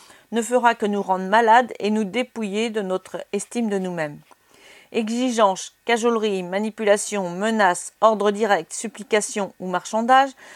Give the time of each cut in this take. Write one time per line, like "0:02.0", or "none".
none